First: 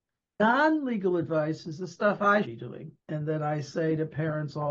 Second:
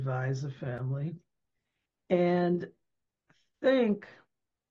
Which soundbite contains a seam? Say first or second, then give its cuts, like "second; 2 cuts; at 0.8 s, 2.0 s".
first; 2 cuts; at 2.4 s, 3.0 s